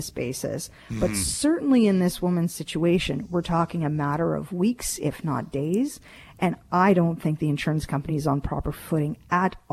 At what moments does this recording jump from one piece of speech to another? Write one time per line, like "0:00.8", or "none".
none